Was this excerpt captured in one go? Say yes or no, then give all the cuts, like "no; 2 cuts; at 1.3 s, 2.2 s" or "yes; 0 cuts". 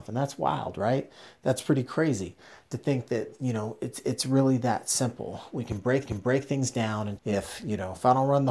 no; 2 cuts; at 6.0 s, 7.2 s